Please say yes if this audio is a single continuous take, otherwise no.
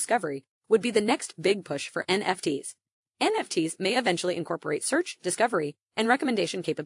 yes